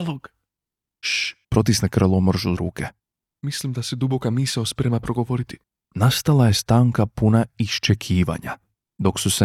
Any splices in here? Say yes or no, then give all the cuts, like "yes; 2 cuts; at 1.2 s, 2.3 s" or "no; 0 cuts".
yes; 3 cuts; at 1.4 s, 2.6 s, 5.6 s